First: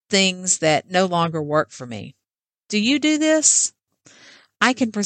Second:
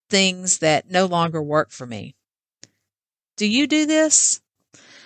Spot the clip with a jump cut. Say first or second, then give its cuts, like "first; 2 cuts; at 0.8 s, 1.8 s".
first; 1 cut; at 2.3 s